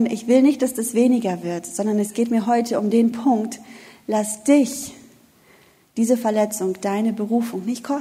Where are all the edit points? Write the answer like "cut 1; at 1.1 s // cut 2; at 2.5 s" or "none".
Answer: none